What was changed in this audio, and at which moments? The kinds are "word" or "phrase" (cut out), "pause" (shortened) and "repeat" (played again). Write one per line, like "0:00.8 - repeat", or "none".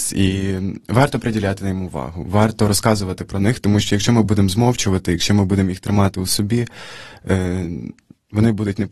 none